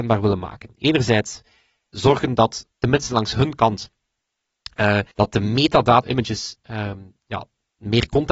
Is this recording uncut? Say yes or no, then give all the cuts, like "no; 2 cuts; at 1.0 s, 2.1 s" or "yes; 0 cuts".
no; 4 cuts; at 1.9 s, 2.7 s, 5.1 s, 6.0 s